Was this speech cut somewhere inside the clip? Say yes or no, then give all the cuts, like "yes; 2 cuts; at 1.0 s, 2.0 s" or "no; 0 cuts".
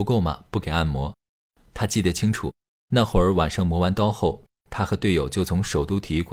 no; 0 cuts